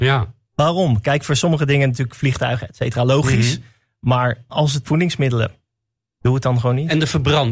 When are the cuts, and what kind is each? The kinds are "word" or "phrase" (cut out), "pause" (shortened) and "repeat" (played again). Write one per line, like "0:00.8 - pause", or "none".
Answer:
0:04.5 - word
0:04.8 - phrase